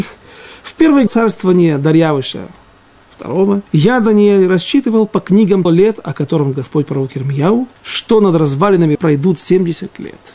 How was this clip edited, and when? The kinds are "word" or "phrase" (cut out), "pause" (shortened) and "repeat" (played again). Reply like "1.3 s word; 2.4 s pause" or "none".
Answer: 1.1 s word; 3.7 s pause; 5.7 s word; 6.5 s word; 7.8 s pause; 8.9 s word